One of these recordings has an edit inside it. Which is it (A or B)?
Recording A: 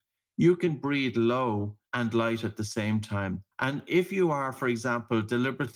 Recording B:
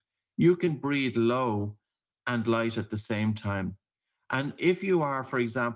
A